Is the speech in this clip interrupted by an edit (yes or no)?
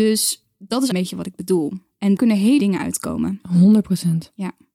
yes